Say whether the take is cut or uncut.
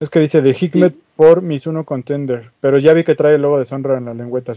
uncut